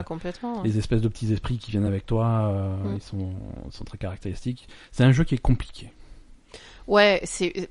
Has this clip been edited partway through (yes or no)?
no